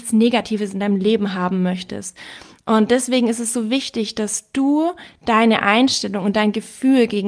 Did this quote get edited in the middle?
no; 0 cuts

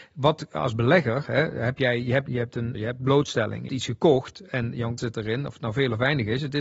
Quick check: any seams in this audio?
yes; 4 cuts; at 2.3 s, 2.7 s, 3.7 s, 5.0 s

